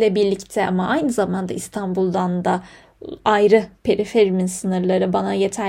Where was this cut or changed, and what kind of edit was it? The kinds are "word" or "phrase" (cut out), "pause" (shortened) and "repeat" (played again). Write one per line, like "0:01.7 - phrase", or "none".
none